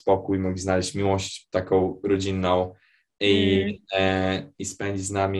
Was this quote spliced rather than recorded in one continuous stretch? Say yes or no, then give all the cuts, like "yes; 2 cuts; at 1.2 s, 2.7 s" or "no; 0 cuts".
no; 0 cuts